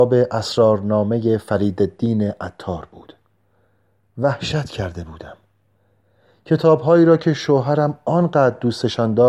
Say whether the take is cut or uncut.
uncut